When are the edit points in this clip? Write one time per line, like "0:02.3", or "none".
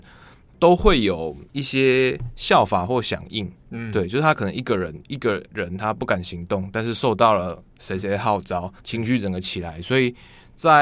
0:01.5
0:03.6
0:08.8